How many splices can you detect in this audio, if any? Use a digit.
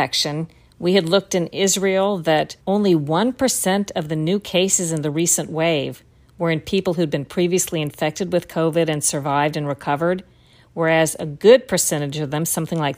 1